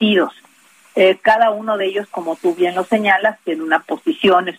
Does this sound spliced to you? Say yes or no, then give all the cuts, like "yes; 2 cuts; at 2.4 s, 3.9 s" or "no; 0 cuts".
no; 0 cuts